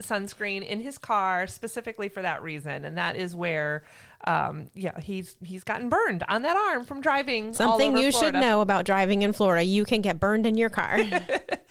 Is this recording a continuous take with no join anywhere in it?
yes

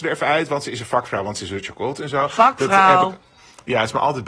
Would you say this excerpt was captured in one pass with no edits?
yes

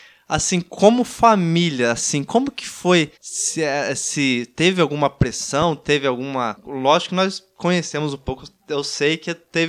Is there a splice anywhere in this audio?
yes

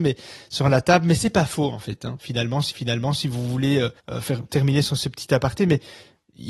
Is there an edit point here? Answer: yes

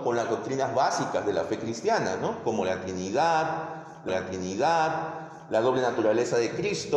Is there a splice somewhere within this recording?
yes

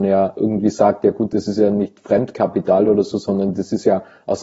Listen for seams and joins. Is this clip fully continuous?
yes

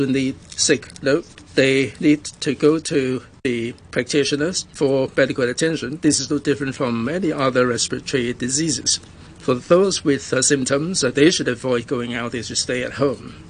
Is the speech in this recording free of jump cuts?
yes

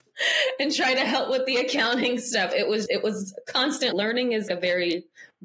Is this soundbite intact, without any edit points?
no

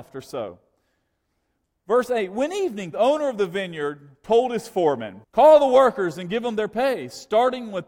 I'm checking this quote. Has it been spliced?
yes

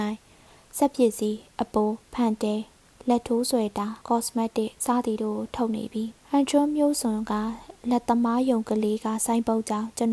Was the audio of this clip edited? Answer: yes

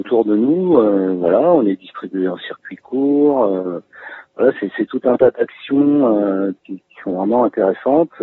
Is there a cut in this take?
yes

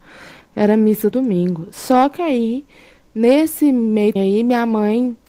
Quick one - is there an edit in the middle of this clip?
yes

